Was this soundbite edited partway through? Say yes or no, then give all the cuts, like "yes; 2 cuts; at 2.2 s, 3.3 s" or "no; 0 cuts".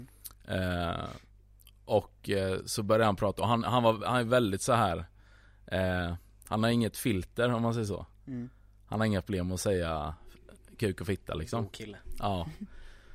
no; 0 cuts